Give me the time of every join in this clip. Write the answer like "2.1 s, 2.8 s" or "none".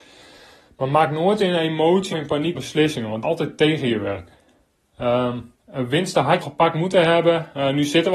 2.1 s, 2.5 s, 3.2 s, 5.5 s, 6.4 s